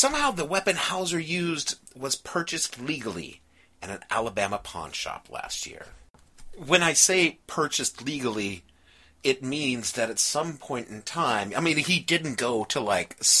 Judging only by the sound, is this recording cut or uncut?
uncut